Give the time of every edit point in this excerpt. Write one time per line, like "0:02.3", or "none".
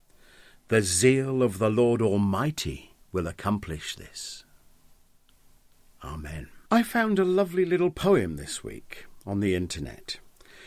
0:03.0
0:06.6